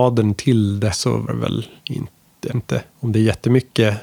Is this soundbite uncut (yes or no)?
no